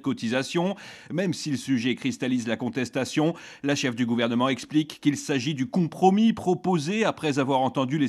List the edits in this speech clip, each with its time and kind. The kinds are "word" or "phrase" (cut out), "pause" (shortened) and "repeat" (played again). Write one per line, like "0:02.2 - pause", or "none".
none